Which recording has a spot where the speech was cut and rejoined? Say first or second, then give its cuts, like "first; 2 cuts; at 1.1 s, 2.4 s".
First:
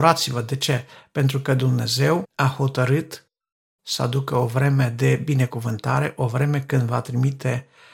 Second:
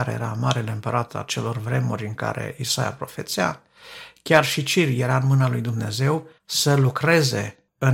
second; 1 cut; at 6.4 s